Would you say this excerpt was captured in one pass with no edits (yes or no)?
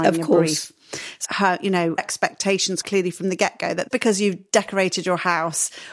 no